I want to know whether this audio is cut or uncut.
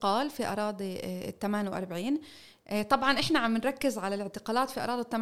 uncut